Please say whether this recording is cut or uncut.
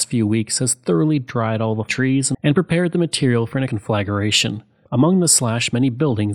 cut